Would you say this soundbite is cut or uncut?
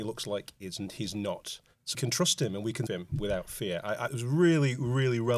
cut